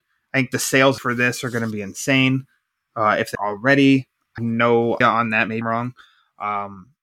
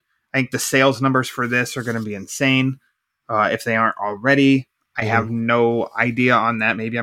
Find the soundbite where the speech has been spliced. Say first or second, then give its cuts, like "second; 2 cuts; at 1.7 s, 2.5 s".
first; 5 cuts; at 1.0 s, 3.3 s, 4.4 s, 5.0 s, 5.6 s